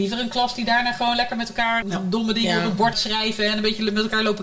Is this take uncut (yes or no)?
no